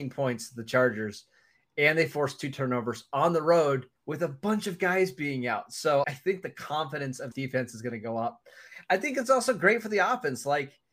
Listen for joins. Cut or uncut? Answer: cut